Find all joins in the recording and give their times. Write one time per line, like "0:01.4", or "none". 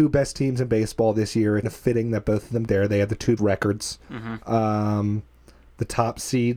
0:01.6
0:02.7
0:03.4